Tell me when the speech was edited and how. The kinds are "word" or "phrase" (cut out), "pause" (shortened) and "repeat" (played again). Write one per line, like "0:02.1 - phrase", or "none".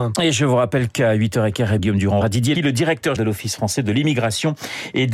0:01.8 - word
0:02.2 - word
0:02.5 - word
0:03.2 - word